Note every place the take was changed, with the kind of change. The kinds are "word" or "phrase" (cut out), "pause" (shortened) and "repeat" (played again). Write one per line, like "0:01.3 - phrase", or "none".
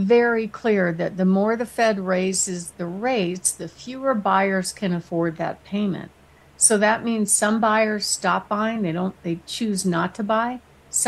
none